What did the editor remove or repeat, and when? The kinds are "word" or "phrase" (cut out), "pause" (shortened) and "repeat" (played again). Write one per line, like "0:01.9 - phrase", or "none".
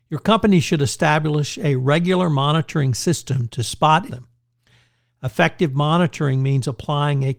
0:04.1 - phrase